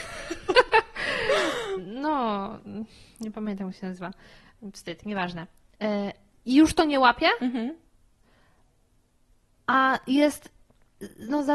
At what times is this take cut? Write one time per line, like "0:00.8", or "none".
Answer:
none